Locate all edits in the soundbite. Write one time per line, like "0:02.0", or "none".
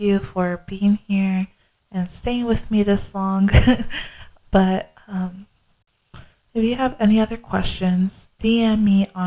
none